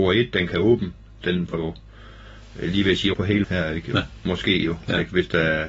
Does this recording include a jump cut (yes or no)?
yes